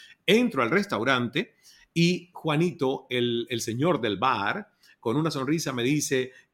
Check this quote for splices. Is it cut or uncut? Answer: uncut